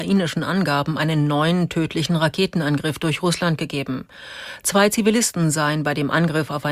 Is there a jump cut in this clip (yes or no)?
no